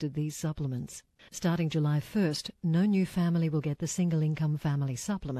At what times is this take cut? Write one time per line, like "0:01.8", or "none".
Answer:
0:01.2

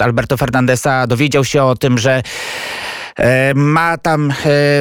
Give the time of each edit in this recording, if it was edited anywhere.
none

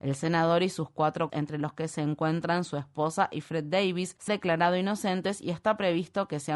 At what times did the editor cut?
0:01.3
0:04.3

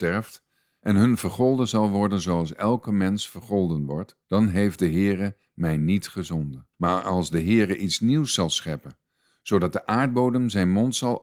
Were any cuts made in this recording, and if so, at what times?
0:04.2
0:06.7

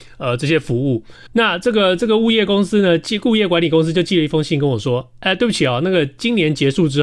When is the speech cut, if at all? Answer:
0:01.3

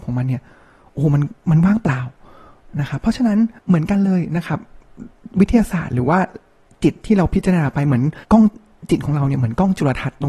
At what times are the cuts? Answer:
0:03.6
0:08.2

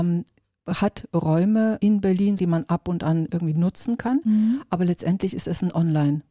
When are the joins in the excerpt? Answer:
0:01.8
0:02.4

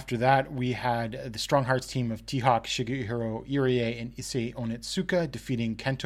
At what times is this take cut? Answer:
none

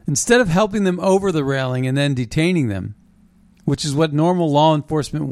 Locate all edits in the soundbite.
none

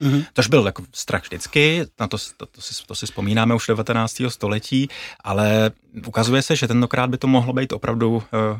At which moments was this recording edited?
none

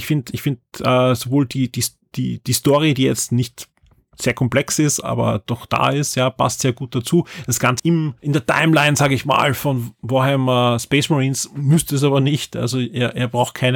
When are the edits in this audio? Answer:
0:05.0
0:07.8
0:08.2

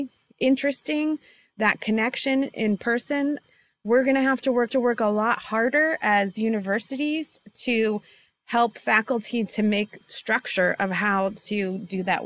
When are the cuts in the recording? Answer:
0:04.7
0:10.0

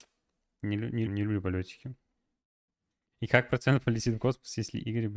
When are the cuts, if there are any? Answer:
0:01.1

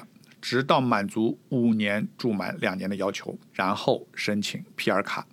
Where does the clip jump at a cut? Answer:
0:02.1
0:03.5

